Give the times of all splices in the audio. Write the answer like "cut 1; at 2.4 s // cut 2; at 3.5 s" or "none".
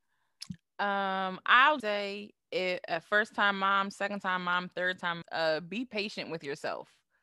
cut 1; at 1.8 s // cut 2; at 5.2 s